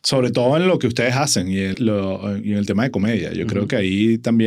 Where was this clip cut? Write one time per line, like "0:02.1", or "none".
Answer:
0:01.7